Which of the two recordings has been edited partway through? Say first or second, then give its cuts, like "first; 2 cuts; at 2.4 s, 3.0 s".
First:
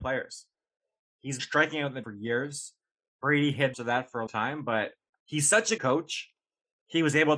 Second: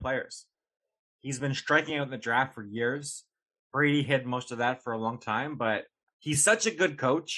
first; 5 cuts; at 1.4 s, 2.0 s, 3.7 s, 4.3 s, 5.8 s